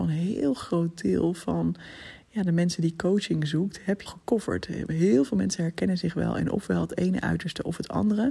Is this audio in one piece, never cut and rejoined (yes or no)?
no